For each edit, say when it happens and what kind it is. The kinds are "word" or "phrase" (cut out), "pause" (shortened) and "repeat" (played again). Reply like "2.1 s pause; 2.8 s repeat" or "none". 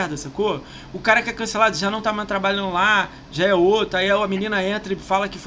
none